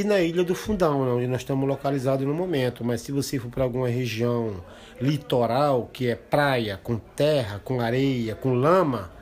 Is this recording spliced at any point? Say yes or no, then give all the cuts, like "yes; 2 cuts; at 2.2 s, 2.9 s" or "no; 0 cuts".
no; 0 cuts